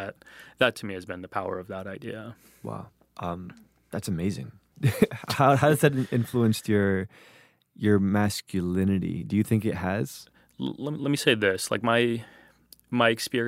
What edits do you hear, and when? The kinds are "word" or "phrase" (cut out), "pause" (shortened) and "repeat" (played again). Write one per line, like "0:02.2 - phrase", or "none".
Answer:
none